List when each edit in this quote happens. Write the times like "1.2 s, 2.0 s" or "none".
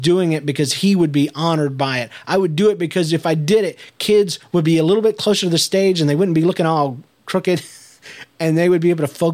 none